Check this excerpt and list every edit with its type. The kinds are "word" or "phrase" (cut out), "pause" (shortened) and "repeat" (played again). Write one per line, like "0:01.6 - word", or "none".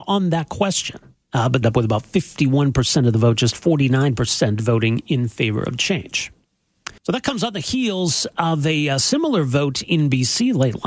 0:01.2 - pause
0:01.6 - phrase
0:07.0 - pause